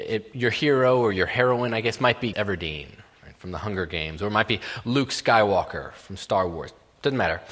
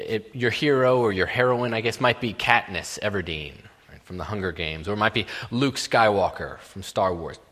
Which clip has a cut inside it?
first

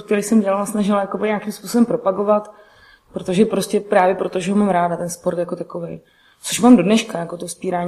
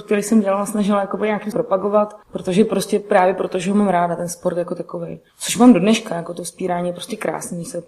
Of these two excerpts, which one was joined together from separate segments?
second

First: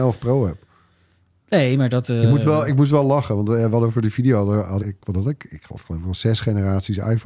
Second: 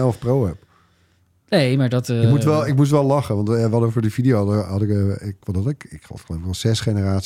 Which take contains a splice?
first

